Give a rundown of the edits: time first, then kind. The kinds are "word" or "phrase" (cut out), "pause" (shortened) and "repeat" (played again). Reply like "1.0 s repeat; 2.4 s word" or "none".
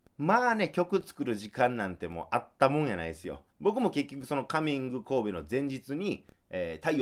3.5 s pause